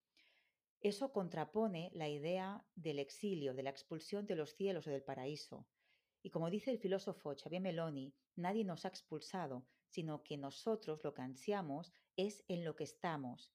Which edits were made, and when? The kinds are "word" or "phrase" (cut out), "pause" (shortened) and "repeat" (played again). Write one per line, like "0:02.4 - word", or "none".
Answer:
none